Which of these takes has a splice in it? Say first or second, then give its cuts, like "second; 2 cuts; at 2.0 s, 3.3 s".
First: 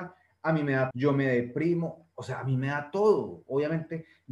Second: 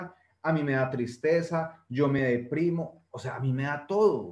first; 1 cut; at 0.9 s